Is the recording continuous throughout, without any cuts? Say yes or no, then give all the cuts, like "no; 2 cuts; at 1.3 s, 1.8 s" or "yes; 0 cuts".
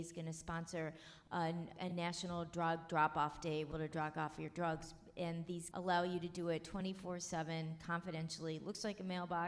no; 3 cuts; at 1.7 s, 3.7 s, 5.7 s